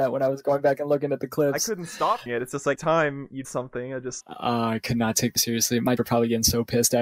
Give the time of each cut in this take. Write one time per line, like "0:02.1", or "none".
0:02.3
0:02.7
0:03.4
0:04.2
0:05.4
0:06.0